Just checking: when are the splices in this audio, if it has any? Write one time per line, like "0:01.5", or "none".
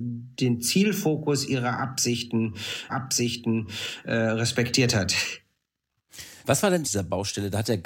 0:02.9
0:06.4
0:06.8